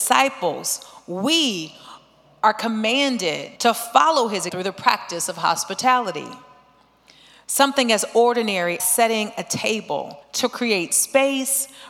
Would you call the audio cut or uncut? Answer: cut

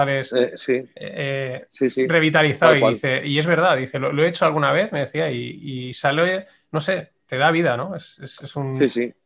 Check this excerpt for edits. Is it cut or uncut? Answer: uncut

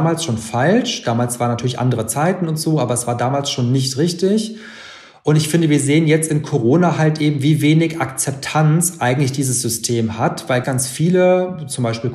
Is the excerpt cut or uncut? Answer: cut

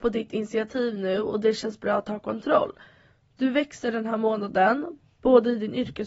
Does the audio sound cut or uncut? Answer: uncut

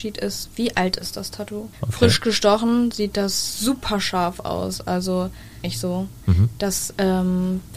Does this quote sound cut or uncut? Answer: cut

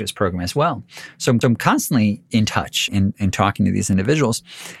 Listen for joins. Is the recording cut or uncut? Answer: cut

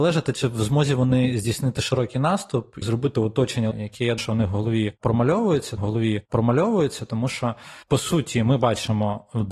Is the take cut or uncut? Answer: cut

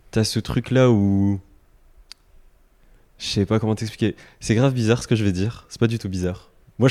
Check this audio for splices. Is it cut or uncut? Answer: uncut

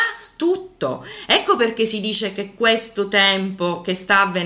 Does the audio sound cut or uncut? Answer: uncut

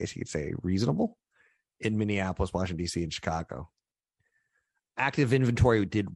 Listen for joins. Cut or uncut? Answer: uncut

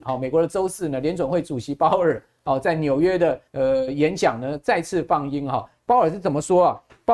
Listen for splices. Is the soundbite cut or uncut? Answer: cut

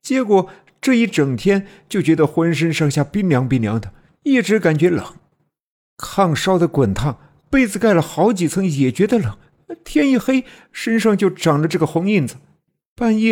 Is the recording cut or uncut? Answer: uncut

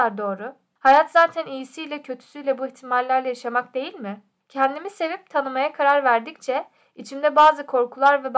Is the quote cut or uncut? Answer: uncut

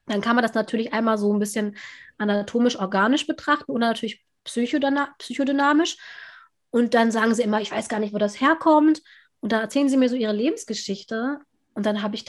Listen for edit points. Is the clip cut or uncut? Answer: uncut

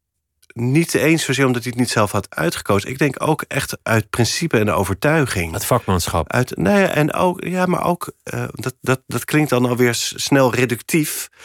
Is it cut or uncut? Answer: uncut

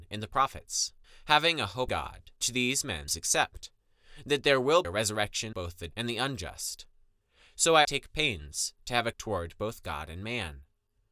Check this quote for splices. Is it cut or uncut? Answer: cut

